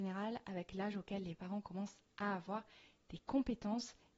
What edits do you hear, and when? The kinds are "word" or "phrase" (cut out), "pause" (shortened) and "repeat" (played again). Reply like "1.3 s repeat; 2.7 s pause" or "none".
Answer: none